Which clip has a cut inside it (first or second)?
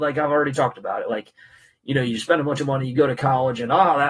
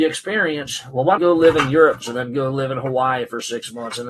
second